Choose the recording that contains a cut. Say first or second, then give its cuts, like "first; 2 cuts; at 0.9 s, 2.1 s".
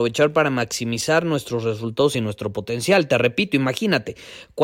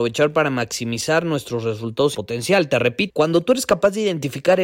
second; 2 cuts; at 2.1 s, 3.1 s